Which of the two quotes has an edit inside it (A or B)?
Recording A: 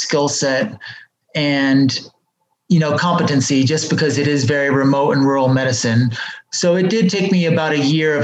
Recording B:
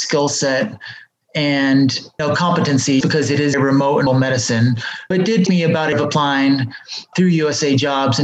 B